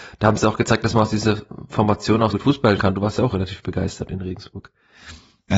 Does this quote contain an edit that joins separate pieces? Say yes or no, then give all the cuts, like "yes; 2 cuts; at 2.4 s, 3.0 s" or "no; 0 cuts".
yes; 2 cuts; at 2.3 s, 2.8 s